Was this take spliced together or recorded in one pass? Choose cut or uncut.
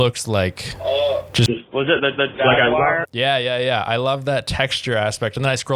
cut